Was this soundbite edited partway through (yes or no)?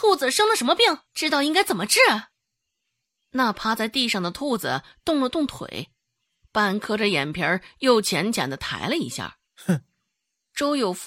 yes